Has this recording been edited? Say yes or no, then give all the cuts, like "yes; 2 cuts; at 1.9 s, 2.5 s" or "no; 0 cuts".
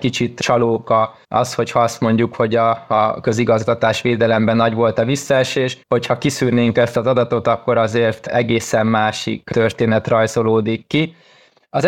yes; 2 cuts; at 1.2 s, 5.8 s